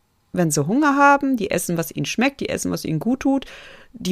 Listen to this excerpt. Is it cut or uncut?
uncut